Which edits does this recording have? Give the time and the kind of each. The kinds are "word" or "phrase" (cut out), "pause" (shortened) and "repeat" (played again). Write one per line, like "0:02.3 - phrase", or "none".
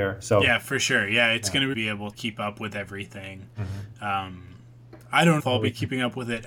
0:01.7 - phrase
0:02.1 - word
0:05.4 - word